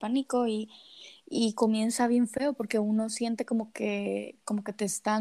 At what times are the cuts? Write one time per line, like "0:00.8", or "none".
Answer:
none